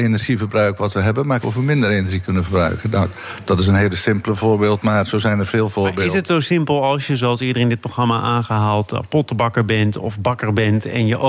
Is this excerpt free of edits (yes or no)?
no